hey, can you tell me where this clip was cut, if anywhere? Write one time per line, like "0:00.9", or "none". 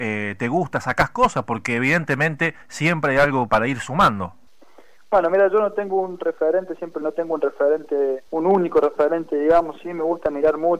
0:02.6
0:03.5
0:04.5
0:07.0
0:08.3